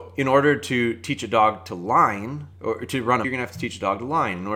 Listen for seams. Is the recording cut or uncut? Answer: cut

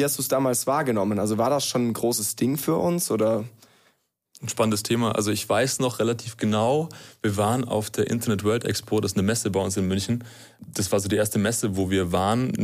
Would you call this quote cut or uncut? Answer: uncut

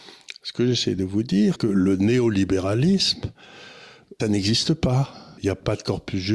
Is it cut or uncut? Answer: cut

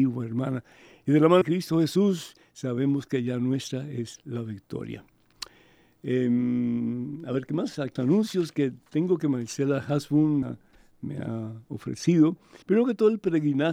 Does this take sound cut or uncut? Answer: cut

